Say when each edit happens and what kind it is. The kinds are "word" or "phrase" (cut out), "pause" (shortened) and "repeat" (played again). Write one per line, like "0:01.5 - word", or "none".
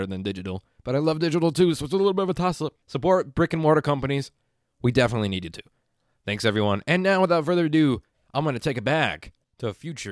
0:02.8 - pause